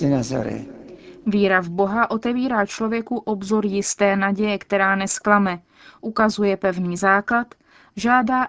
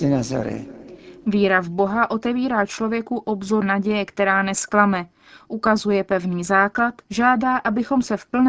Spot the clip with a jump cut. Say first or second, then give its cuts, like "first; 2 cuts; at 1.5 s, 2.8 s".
second; 2 cuts; at 3.6 s, 7.0 s